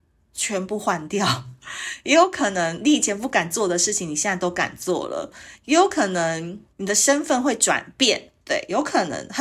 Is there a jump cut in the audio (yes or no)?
yes